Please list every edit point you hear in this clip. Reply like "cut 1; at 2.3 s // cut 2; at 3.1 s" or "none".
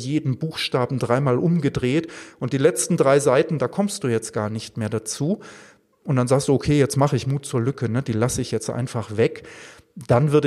none